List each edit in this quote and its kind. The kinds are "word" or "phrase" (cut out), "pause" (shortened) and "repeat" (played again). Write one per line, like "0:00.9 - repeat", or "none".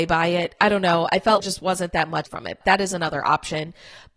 0:01.4 - phrase
0:02.3 - phrase
0:02.6 - word